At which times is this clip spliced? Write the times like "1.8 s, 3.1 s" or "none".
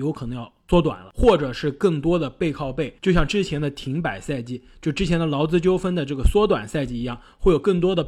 3.0 s